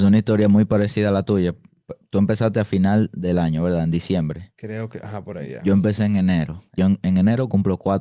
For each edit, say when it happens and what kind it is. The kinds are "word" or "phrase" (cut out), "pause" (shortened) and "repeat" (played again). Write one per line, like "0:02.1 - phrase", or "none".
0:06.8 - phrase